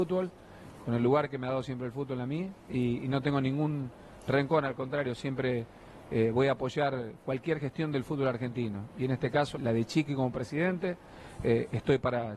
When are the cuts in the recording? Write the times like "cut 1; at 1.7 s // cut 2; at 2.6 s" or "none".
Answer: cut 1; at 9.5 s